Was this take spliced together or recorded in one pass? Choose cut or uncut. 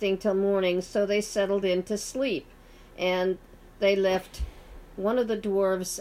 uncut